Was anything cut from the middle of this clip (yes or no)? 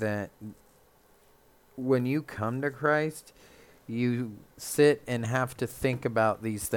yes